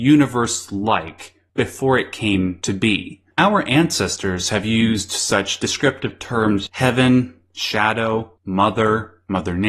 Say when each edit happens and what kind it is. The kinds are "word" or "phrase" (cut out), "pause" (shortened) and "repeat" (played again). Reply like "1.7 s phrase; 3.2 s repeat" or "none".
3.3 s pause; 6.7 s word; 8.4 s pause